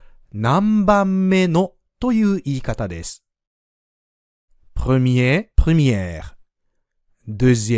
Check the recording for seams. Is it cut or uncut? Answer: cut